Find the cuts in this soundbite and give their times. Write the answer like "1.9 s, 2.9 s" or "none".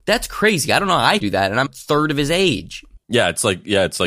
1.2 s, 1.7 s

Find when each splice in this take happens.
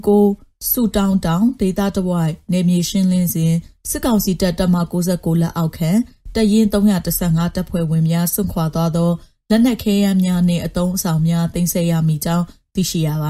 none

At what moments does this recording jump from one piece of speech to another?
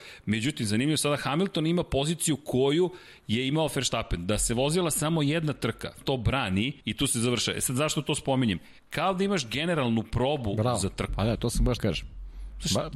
6.0 s, 6.8 s, 8.8 s, 11.8 s

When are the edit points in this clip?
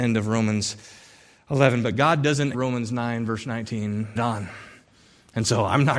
2.5 s, 4.2 s

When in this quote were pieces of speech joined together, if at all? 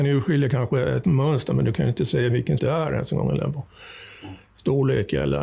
1.0 s, 2.6 s

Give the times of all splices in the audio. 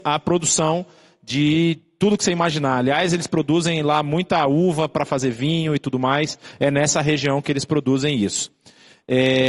none

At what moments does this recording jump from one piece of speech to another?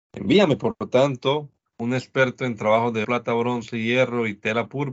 1.6 s, 3.0 s

